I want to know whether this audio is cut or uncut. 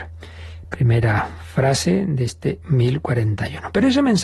uncut